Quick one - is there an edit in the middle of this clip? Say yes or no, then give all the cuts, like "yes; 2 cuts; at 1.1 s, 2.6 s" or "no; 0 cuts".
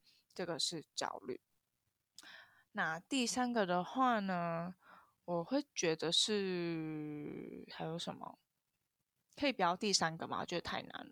no; 0 cuts